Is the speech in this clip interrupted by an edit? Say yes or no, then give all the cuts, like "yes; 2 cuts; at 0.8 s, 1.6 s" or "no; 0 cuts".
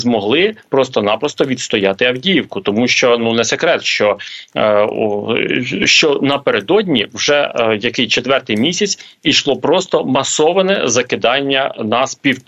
no; 0 cuts